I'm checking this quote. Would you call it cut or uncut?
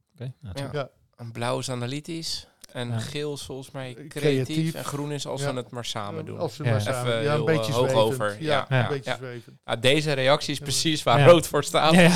uncut